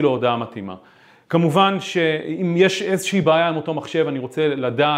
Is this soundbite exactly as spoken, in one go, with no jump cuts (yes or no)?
yes